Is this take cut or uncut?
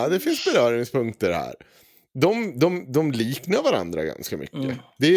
uncut